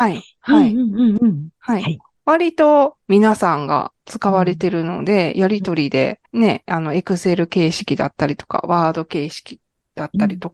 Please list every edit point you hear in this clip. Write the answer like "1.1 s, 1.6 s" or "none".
6.3 s